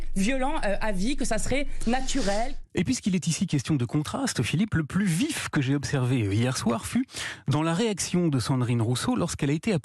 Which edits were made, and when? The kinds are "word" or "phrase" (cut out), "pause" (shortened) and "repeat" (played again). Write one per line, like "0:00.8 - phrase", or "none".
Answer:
none